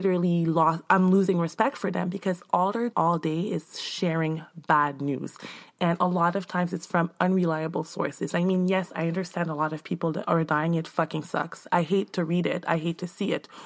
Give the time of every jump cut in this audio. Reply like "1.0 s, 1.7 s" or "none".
2.9 s